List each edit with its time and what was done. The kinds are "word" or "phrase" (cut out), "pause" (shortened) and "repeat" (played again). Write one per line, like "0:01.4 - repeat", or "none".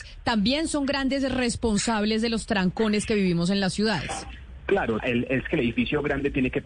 0:05.0 - word